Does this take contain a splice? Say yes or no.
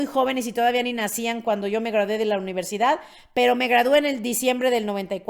no